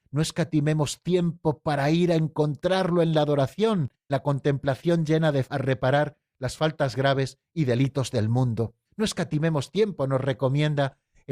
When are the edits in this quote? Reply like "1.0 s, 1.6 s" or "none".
4.1 s, 5.5 s, 8.8 s